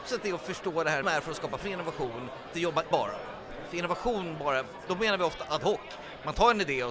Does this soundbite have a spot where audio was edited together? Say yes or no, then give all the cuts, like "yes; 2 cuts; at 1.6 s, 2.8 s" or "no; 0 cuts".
yes; 4 cuts; at 1.0 s, 1.6 s, 2.5 s, 2.9 s